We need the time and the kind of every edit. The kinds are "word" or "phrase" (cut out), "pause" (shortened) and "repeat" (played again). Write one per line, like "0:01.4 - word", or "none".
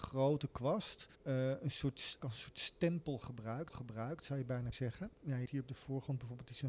0:01.2 - pause
0:02.2 - word
0:03.7 - repeat
0:04.7 - word
0:05.1 - pause
0:05.5 - phrase